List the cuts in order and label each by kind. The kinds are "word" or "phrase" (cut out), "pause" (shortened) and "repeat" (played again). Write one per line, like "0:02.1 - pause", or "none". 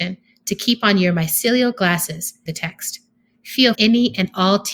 0:02.5 - phrase
0:03.7 - word